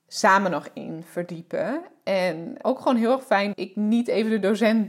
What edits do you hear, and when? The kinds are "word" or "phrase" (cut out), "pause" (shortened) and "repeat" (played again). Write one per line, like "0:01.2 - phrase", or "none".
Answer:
0:02.6 - word
0:03.5 - word